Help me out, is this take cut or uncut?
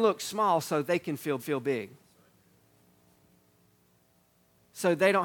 cut